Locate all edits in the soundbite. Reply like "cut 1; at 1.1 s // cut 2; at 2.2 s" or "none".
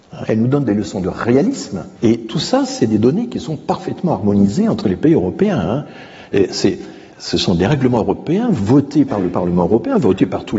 cut 1; at 1.9 s // cut 2; at 7.1 s

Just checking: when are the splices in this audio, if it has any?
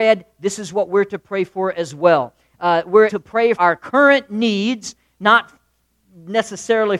cut 1; at 3.1 s // cut 2; at 3.6 s

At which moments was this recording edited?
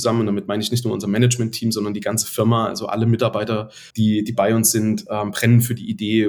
cut 1; at 3.9 s

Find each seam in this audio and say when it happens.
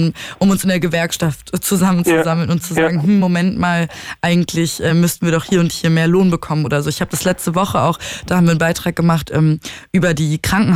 none

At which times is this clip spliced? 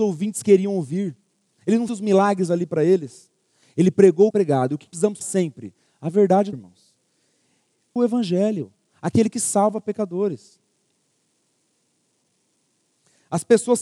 cut 1; at 1.9 s // cut 2; at 4.3 s // cut 3; at 4.9 s // cut 4; at 5.2 s // cut 5; at 6.5 s // cut 6; at 8.0 s

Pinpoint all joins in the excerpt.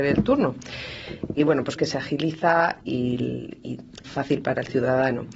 cut 1; at 1.4 s // cut 2; at 1.8 s // cut 3; at 2.8 s // cut 4; at 4.0 s

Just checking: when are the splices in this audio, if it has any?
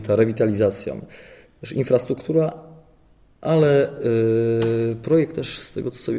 none

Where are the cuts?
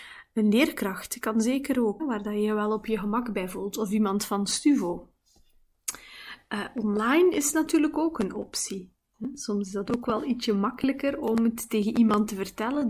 cut 1; at 2.0 s

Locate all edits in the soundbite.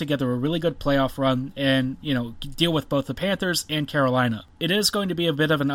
none

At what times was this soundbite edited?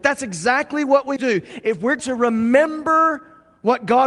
cut 1; at 1.2 s // cut 2; at 2.0 s

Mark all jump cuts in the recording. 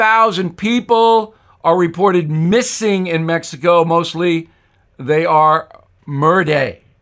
none

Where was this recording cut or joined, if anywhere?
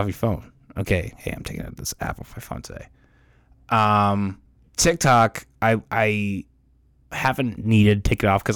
none

